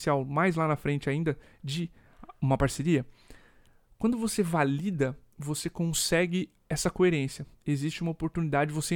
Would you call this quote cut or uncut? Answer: uncut